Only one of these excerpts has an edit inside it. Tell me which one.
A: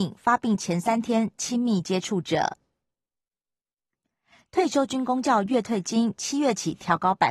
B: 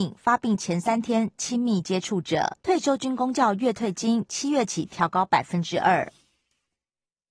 B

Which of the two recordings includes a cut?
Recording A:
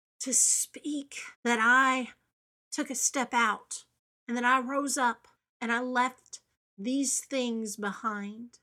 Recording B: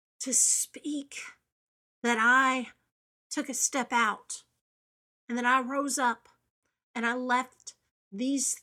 A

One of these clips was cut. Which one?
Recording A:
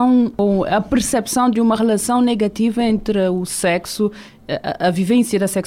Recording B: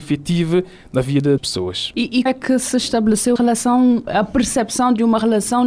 B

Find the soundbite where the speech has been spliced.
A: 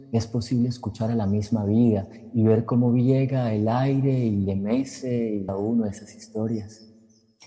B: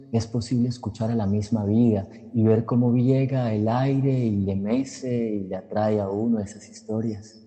A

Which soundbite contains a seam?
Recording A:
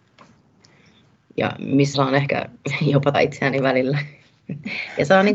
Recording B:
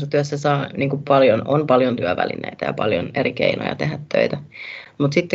A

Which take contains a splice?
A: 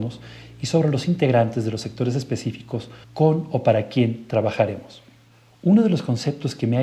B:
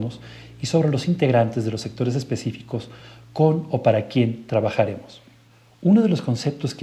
A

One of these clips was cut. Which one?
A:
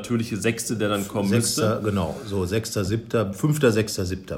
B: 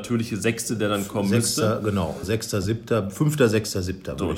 B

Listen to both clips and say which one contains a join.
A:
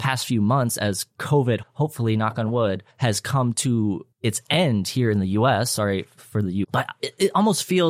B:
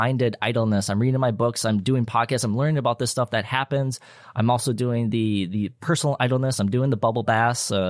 A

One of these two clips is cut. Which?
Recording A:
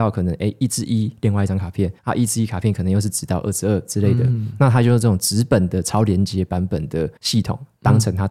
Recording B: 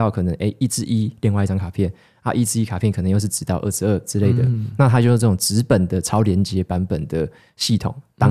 A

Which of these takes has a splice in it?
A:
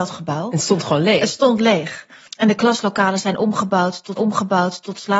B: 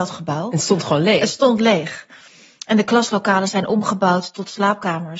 A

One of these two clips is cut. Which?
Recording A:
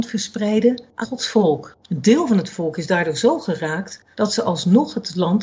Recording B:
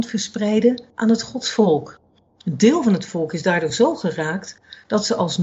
A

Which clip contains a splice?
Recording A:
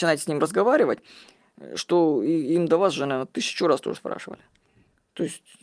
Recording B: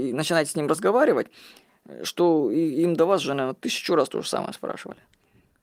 A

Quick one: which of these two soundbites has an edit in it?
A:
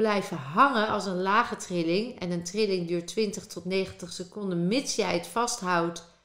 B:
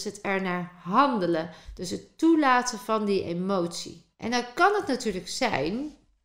B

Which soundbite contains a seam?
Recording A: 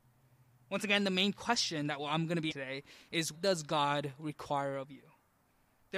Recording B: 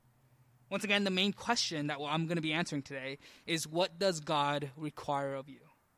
A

